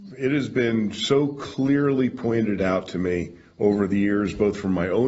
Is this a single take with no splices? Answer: yes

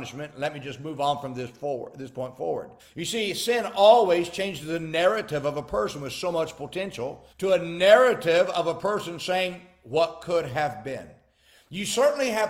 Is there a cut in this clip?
yes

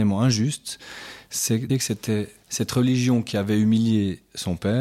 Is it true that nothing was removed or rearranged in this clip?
no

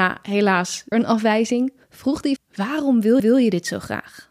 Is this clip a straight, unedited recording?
no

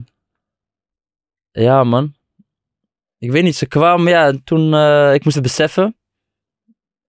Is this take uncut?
no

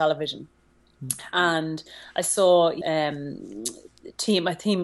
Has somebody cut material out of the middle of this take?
yes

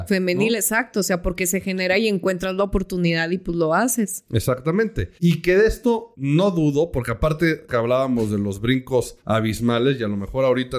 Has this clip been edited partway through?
yes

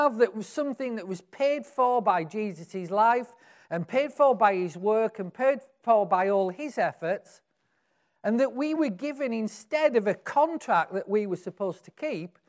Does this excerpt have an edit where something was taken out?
no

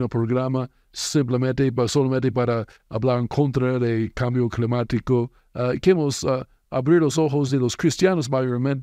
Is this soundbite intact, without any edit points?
yes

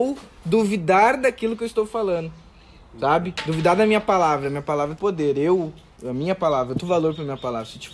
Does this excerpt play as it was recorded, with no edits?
no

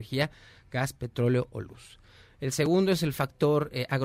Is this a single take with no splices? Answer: yes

